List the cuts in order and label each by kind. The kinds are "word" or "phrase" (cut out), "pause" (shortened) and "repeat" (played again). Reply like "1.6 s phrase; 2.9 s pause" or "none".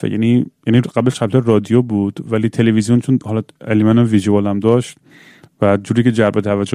none